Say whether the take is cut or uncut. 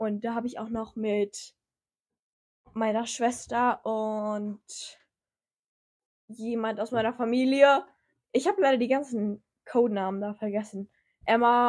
uncut